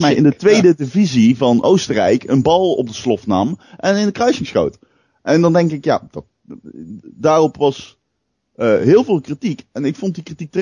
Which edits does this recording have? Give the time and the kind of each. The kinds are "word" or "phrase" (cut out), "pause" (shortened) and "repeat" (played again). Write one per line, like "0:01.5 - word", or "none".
none